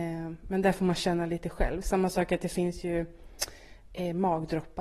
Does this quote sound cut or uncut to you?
uncut